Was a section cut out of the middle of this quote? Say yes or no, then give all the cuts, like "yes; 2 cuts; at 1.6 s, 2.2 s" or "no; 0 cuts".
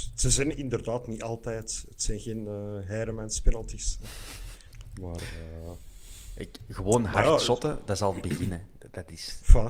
no; 0 cuts